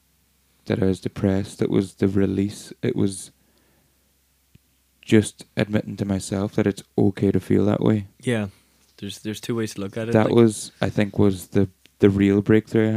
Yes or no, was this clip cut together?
no